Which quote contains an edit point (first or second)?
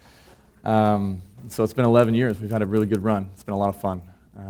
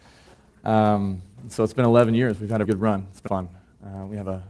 second